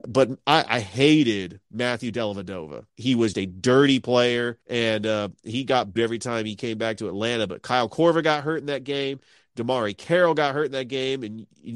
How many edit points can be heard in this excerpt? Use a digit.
4